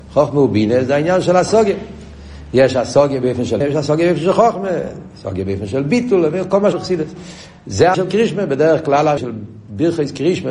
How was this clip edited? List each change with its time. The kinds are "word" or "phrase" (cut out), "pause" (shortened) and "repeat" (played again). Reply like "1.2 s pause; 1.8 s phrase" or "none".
3.6 s word; 6.7 s word; 7.9 s word; 9.2 s word